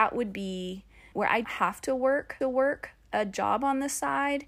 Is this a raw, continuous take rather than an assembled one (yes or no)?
no